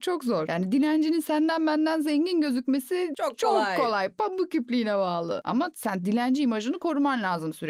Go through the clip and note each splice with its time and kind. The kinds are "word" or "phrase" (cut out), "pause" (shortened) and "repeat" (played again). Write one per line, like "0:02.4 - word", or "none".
none